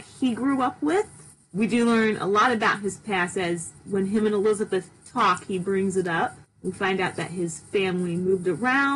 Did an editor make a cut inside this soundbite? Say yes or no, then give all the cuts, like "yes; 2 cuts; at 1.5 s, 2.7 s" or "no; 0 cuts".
no; 0 cuts